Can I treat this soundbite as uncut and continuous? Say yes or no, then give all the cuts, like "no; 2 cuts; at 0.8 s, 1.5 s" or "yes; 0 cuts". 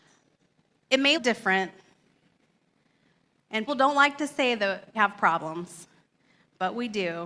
no; 3 cuts; at 1.1 s, 3.7 s, 4.9 s